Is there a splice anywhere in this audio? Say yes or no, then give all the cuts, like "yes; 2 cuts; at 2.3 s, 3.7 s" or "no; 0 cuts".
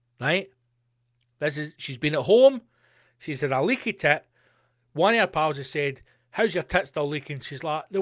no; 0 cuts